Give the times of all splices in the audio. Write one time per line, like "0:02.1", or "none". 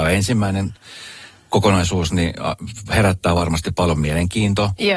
none